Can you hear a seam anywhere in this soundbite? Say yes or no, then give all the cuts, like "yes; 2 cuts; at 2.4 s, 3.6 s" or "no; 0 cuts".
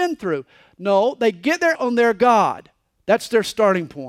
yes; 1 cut; at 1.7 s